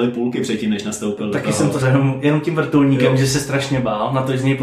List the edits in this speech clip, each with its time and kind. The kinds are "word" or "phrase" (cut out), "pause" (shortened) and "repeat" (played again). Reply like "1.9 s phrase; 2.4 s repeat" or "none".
1.8 s word